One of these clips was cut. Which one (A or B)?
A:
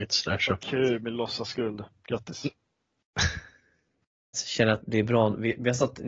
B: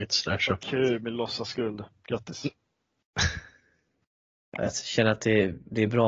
A